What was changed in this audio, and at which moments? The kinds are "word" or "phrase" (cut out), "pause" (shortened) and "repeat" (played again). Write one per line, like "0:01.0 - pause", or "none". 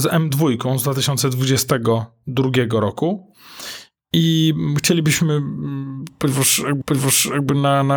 0:06.8 - repeat